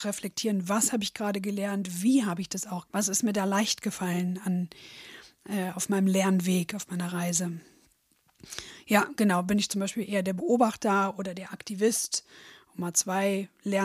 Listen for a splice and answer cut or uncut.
cut